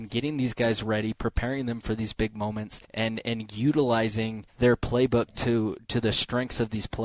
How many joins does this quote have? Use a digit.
2